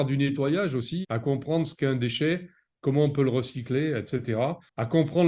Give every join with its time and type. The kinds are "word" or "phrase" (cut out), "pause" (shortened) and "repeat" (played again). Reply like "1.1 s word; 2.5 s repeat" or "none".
1.0 s word